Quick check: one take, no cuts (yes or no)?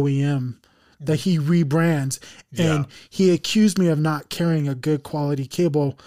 yes